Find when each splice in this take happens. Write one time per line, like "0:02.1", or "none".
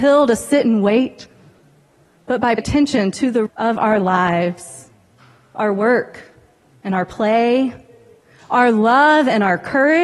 0:02.6
0:03.5